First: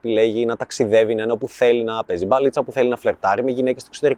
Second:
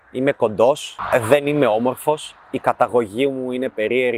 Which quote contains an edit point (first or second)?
second